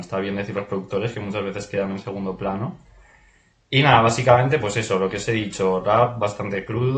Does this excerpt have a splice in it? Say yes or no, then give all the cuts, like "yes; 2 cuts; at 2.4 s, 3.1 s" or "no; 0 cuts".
no; 0 cuts